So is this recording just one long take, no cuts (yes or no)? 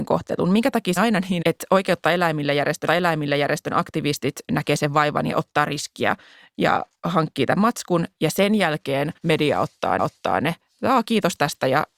no